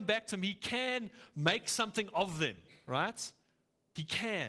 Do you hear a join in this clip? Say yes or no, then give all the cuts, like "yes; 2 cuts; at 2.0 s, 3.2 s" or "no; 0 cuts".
no; 0 cuts